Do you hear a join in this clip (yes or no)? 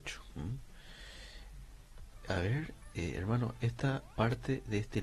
no